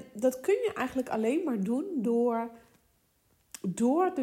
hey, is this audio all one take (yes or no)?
yes